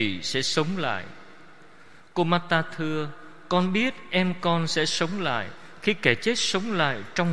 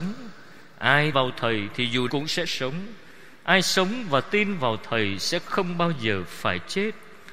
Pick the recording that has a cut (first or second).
second